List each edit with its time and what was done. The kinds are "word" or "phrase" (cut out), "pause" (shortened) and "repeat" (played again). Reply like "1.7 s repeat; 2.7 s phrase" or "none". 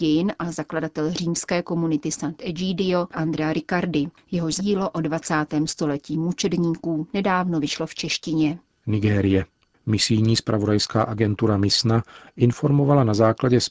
3.1 s word; 4.6 s word; 8.7 s pause